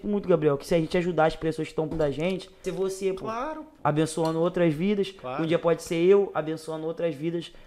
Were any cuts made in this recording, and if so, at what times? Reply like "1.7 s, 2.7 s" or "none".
1.9 s, 2.6 s